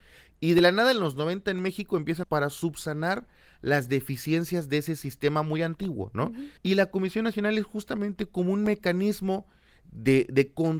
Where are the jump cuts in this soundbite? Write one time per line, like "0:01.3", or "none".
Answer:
0:02.2
0:06.6

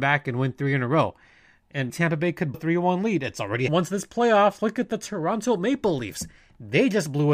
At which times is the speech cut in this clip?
0:01.9
0:02.5
0:03.7

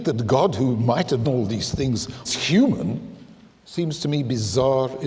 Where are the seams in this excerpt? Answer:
0:01.2
0:02.3

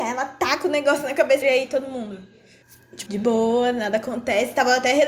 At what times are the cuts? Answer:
0:01.4
0:03.1

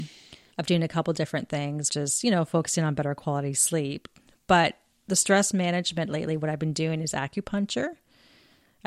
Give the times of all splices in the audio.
0:01.9

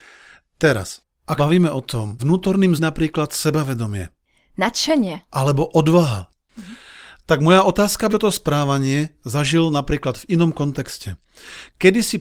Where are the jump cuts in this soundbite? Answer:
0:01.4
0:02.2
0:02.8
0:05.3
0:08.1

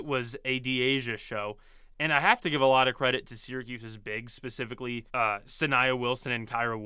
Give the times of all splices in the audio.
0:05.1

